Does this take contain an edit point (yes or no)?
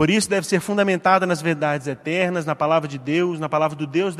no